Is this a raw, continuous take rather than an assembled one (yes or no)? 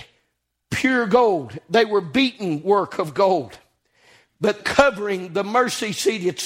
no